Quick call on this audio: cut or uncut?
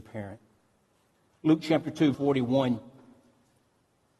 cut